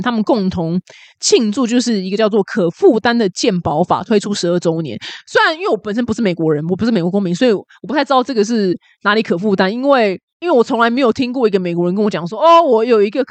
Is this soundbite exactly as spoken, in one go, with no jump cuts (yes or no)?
yes